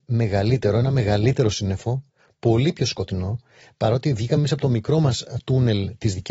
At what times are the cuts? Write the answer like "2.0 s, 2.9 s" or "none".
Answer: none